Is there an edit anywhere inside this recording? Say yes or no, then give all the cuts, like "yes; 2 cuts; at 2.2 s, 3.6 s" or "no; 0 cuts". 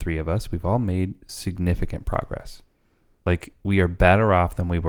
no; 0 cuts